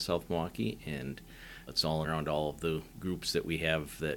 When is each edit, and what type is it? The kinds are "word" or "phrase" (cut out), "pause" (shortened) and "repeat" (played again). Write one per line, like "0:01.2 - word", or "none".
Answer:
0:01.7 - word
0:02.0 - phrase